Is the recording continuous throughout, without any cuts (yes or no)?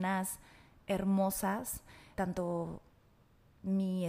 no